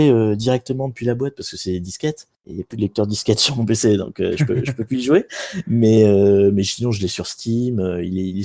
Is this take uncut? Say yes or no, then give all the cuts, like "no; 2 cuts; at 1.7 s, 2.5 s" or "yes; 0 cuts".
no; 1 cut; at 2.3 s